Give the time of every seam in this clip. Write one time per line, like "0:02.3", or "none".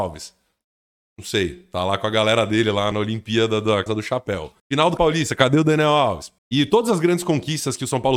0:02.9
0:03.9
0:04.6
0:05.0
0:06.4

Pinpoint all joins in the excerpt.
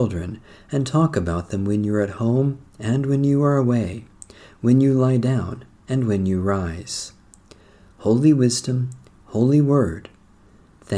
none

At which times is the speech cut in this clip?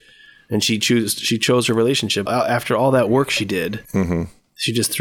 0:02.3
0:03.8

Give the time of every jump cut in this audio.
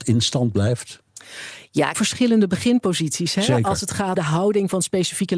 0:01.9
0:04.2

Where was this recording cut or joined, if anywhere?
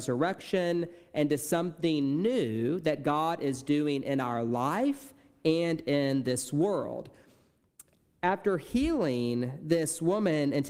none

